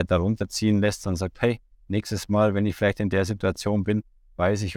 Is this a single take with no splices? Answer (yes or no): yes